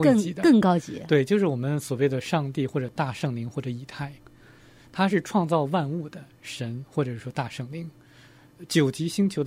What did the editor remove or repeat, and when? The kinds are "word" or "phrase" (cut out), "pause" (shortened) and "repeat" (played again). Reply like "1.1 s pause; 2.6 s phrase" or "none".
none